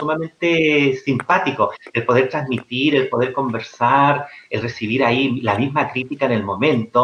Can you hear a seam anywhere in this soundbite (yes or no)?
no